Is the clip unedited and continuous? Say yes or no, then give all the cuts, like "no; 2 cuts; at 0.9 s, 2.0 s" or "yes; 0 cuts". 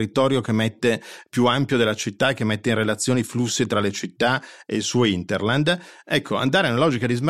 yes; 0 cuts